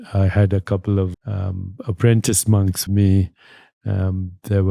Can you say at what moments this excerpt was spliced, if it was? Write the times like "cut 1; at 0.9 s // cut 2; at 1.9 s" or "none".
cut 1; at 1.1 s // cut 2; at 2.9 s